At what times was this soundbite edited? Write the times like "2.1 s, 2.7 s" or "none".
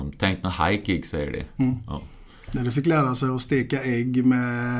none

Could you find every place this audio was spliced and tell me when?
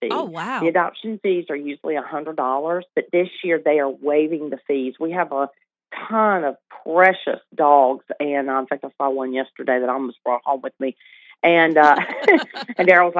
2.9 s

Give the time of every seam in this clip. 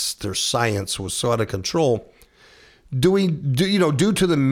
none

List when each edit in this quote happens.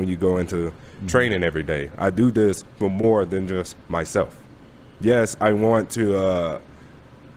none

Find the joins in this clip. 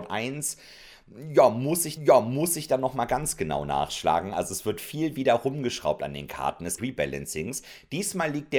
2.0 s, 6.8 s

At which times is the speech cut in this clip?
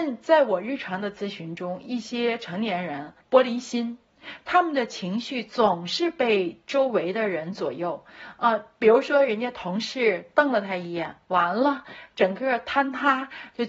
3.2 s

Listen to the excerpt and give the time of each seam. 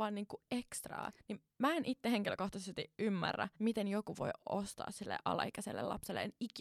1.2 s, 3.5 s

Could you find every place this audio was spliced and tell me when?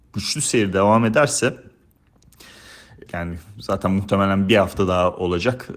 3.1 s

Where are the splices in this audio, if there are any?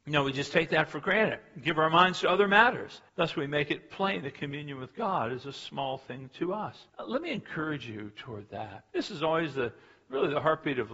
3.1 s, 6.9 s, 8.9 s

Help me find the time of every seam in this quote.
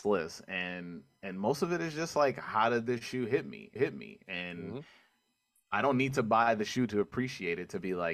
3.8 s

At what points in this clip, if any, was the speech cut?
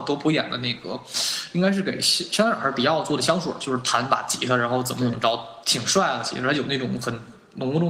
none

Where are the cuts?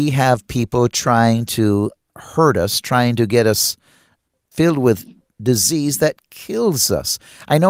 none

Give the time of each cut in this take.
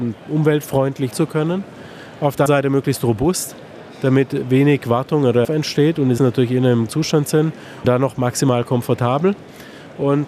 1.1 s, 2.5 s, 5.4 s, 6.2 s, 6.9 s, 7.8 s

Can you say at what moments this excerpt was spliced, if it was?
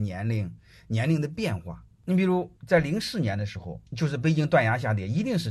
2.6 s, 3.9 s

